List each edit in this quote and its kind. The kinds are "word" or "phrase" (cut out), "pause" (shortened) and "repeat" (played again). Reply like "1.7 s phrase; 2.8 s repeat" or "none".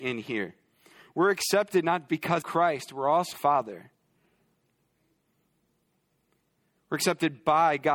2.1 s word; 2.4 s word; 3.3 s phrase